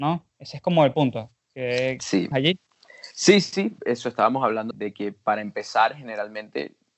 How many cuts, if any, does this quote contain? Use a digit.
5